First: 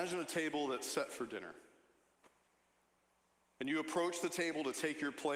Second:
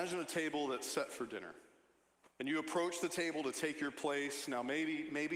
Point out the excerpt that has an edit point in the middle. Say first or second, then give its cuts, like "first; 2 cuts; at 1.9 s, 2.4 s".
second; 1 cut; at 2.3 s